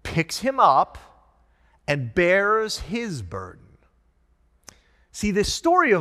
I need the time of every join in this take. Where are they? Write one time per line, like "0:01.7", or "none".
none